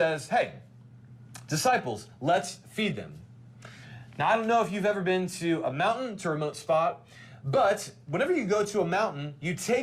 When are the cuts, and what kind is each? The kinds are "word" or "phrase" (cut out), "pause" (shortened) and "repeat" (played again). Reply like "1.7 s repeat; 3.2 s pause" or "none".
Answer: none